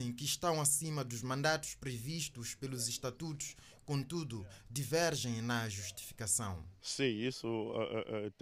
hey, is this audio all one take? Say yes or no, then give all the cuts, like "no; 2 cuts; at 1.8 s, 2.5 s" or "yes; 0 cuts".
yes; 0 cuts